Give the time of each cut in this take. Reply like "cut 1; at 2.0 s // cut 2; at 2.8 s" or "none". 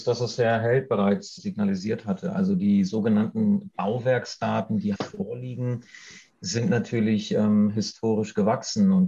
cut 1; at 1.4 s // cut 2; at 4.9 s